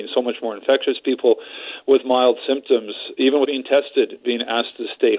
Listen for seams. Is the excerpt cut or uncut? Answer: cut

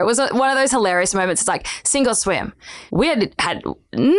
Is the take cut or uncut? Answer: cut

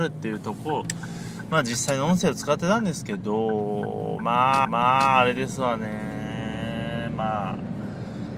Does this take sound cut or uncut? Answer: cut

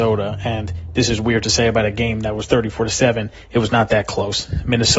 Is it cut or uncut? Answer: uncut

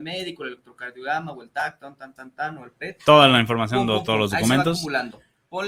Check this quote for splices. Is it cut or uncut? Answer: uncut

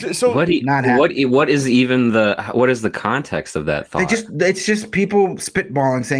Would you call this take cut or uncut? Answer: uncut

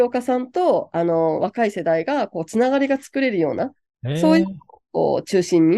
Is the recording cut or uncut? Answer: uncut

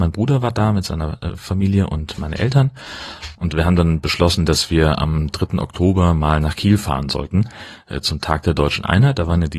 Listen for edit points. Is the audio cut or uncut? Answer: uncut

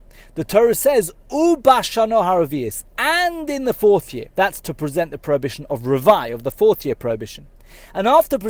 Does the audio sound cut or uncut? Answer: cut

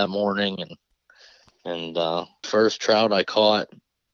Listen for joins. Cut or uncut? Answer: cut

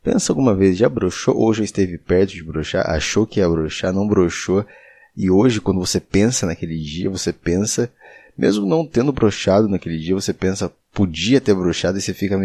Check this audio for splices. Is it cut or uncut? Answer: cut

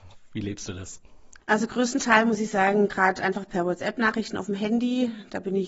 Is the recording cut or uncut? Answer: uncut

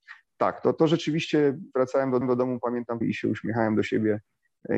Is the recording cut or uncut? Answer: cut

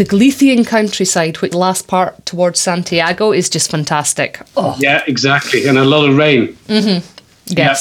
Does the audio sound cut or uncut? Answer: cut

